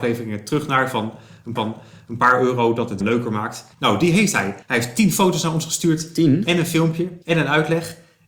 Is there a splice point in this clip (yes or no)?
yes